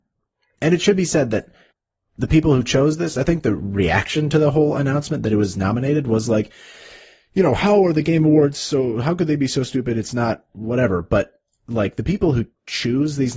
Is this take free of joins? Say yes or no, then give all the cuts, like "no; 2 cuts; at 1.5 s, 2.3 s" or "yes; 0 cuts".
yes; 0 cuts